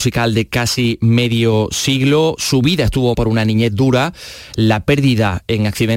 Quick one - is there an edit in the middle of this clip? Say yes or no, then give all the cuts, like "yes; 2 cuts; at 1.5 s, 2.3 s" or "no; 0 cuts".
yes; 1 cut; at 3.1 s